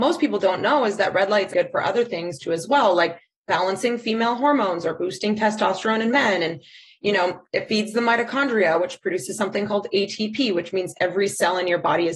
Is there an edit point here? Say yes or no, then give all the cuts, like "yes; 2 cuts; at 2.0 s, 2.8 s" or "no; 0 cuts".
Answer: yes; 1 cut; at 1.5 s